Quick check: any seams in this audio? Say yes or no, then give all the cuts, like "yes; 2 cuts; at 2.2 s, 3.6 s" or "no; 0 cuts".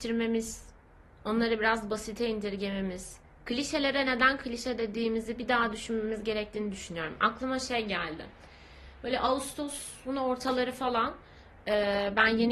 no; 0 cuts